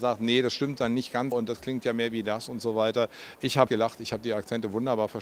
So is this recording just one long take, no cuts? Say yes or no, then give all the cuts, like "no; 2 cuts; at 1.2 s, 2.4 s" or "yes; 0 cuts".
no; 2 cuts; at 1.3 s, 3.7 s